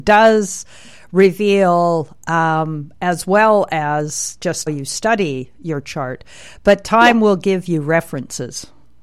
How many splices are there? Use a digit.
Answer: 1